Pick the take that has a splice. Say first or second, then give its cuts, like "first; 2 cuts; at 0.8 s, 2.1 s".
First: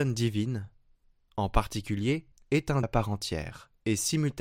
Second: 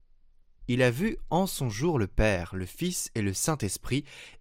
first; 2 cuts; at 2.3 s, 2.8 s